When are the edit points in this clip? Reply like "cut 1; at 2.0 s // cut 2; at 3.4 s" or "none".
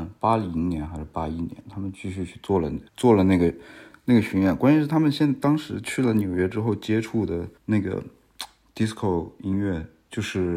cut 1; at 2.9 s // cut 2; at 7.6 s